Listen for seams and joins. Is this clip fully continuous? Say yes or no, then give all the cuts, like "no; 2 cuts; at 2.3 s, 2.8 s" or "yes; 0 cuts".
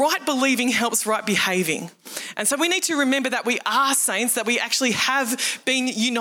yes; 0 cuts